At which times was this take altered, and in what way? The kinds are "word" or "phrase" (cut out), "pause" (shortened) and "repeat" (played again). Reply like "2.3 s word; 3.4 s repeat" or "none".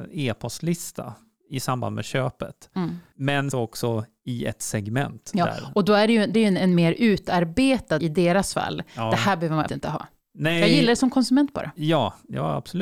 3.5 s word; 6.3 s word; 8.0 s word; 9.7 s word